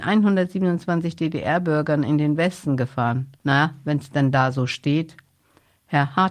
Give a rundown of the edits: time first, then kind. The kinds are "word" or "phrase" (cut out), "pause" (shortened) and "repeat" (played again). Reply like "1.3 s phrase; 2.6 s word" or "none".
3.3 s pause